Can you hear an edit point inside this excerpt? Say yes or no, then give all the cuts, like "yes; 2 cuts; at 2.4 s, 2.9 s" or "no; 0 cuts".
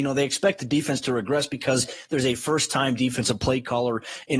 no; 0 cuts